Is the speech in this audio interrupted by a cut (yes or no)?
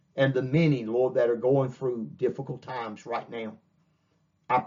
no